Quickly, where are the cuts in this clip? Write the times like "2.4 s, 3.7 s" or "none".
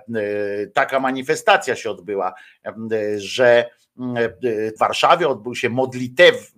4.8 s

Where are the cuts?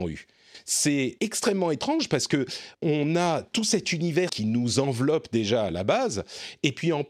1.2 s, 2.7 s, 4.3 s

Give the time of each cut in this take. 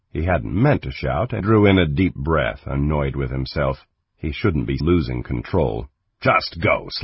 1.4 s, 4.8 s

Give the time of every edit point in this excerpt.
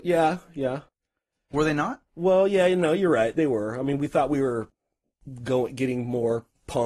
2.1 s

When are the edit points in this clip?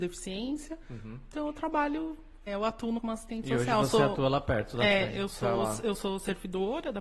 2.5 s, 3.0 s

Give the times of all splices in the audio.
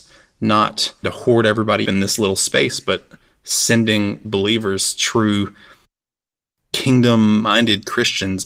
1.0 s, 1.8 s, 4.2 s

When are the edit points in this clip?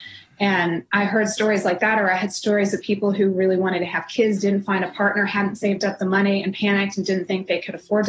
none

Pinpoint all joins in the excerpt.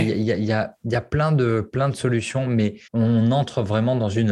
2.9 s

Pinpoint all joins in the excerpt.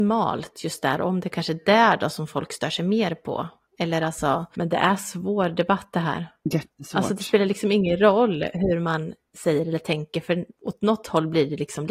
none

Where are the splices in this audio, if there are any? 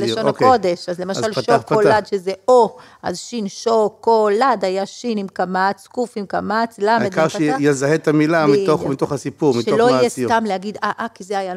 none

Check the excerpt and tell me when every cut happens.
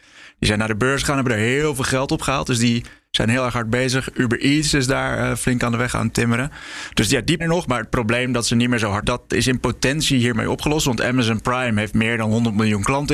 7.4 s, 9.0 s

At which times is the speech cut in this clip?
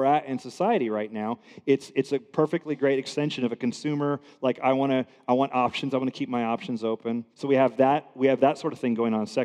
7.3 s

